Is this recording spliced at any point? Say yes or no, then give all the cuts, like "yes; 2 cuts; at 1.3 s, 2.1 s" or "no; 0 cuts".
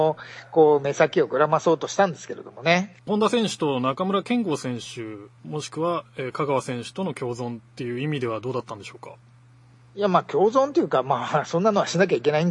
yes; 2 cuts; at 3.0 s, 5.4 s